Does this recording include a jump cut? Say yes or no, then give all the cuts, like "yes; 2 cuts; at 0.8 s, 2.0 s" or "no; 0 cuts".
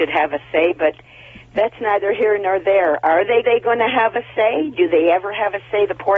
yes; 1 cut; at 3.4 s